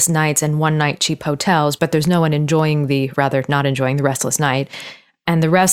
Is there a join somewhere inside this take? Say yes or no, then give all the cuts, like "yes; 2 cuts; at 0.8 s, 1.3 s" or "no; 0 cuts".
yes; 1 cut; at 3.1 s